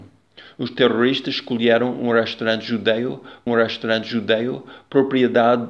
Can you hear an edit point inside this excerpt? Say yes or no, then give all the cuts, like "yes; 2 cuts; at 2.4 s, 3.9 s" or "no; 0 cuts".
yes; 1 cut; at 3.5 s